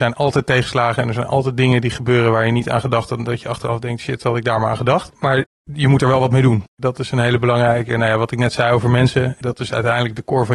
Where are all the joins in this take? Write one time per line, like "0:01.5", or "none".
none